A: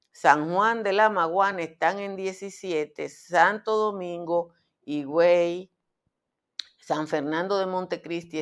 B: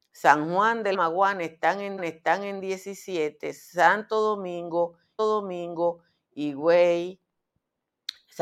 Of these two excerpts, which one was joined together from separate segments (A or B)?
B